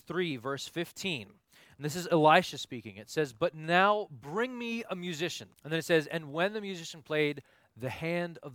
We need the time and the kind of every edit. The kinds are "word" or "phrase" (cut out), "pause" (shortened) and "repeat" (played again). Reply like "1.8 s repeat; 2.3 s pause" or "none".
5.5 s pause